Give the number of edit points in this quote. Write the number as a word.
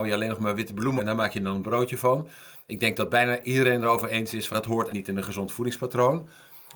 three